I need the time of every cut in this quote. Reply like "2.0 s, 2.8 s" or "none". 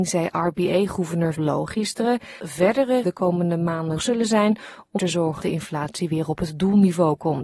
1.3 s, 2.4 s, 3.0 s, 4.0 s, 5.0 s, 5.4 s

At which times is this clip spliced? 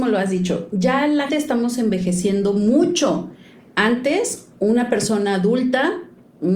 1.3 s, 4.5 s

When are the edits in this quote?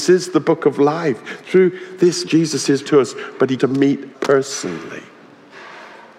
2.2 s, 2.8 s, 3.6 s, 4.1 s

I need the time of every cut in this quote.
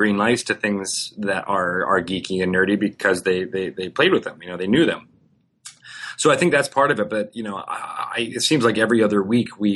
none

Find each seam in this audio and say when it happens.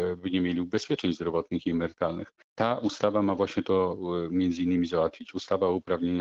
2.4 s

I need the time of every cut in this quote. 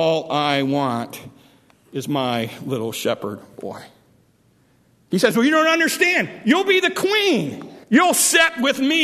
7.8 s

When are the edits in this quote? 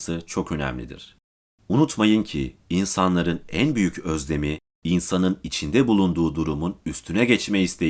none

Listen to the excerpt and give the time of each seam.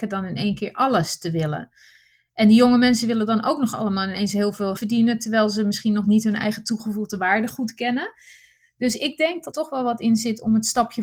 4.8 s, 9.5 s

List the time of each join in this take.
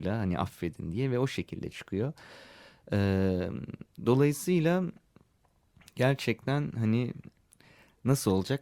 none

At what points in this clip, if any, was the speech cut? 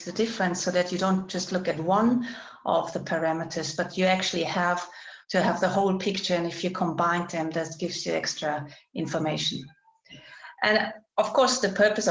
5.2 s

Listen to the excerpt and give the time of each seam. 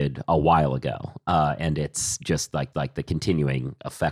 2.7 s

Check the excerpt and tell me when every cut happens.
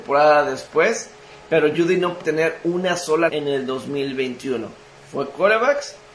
1.7 s, 2.2 s, 3.3 s

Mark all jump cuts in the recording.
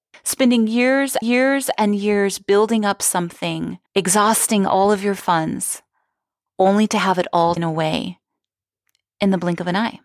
1.2 s, 3.9 s, 7.6 s

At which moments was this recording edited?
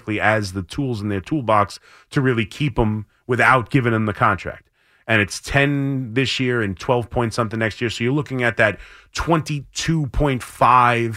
none

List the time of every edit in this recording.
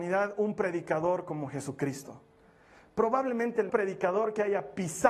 3.7 s

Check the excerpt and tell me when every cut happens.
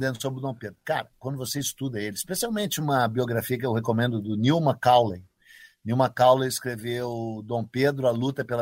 none

